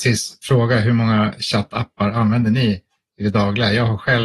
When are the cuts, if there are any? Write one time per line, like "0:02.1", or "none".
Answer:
none